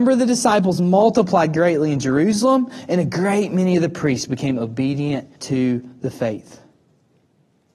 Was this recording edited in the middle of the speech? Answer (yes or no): yes